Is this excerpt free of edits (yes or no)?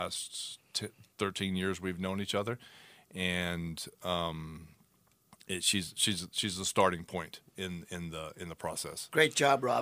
yes